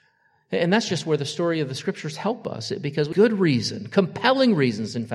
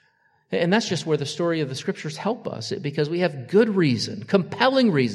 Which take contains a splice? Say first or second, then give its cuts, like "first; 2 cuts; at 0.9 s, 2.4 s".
first; 1 cut; at 3.1 s